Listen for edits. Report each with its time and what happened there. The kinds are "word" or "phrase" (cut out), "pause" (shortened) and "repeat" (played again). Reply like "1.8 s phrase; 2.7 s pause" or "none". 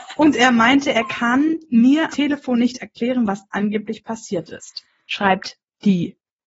2.1 s word